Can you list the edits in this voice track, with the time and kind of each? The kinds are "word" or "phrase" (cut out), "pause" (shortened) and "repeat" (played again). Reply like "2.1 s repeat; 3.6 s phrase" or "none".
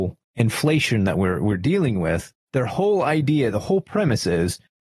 none